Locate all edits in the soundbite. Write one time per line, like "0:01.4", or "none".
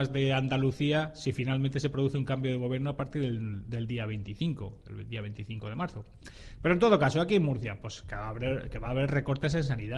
none